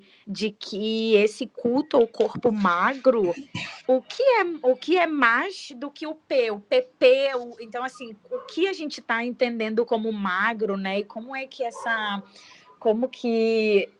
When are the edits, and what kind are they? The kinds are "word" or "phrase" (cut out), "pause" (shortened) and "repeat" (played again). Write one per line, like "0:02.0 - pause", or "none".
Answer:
0:03.8 - pause